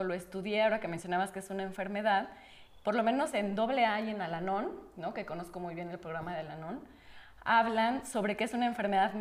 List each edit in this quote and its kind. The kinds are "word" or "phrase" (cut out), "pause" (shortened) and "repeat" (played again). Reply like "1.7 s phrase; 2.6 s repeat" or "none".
none